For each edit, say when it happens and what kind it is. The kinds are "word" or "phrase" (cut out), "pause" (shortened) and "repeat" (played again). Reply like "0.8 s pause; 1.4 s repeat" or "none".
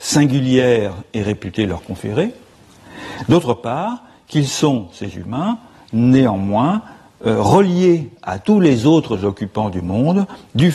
none

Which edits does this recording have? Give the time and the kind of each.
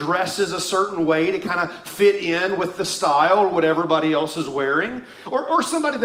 none

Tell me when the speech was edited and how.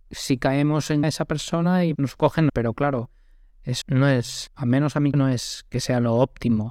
1.0 s word; 2.0 s word; 2.5 s word; 3.8 s word; 4.5 s word; 5.1 s word

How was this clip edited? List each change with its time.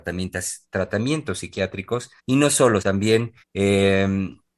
2.2 s pause; 2.8 s word; 3.4 s pause

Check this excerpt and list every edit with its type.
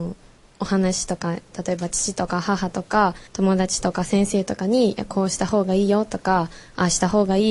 3.3 s pause

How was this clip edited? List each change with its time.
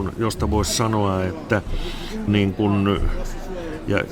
2.3 s word

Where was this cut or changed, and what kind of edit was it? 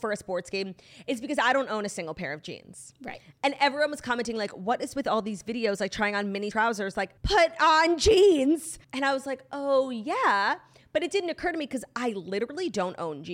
6.5 s phrase; 7.2 s pause; 8.8 s pause

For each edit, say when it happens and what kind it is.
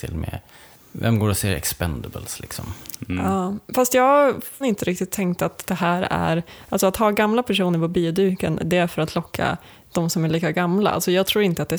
4.6 s word

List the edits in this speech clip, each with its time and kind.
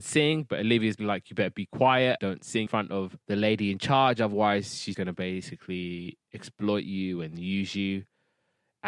1.0 s word; 2.2 s word; 2.7 s word; 3.2 s pause; 4.9 s word

